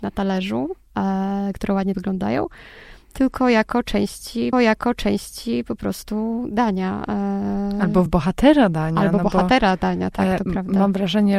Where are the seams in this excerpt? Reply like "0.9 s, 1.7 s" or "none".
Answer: 1.9 s, 4.5 s, 8.1 s